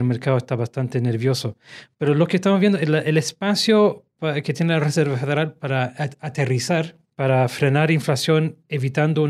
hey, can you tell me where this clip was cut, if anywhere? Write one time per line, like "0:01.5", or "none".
none